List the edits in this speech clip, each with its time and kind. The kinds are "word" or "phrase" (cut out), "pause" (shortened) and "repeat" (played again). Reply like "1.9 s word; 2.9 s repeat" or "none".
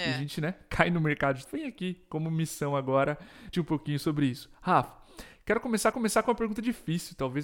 1.5 s word; 3.5 s word; 5.9 s repeat